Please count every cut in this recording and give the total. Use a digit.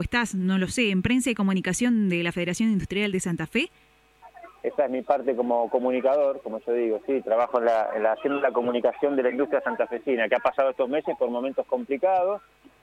0